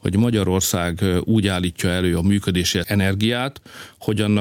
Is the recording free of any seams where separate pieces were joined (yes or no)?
no